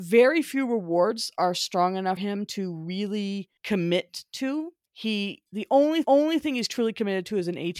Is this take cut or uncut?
cut